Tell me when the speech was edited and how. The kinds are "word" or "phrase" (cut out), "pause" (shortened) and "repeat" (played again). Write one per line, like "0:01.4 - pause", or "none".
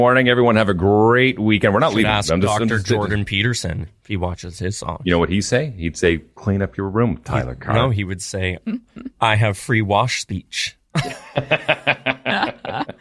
none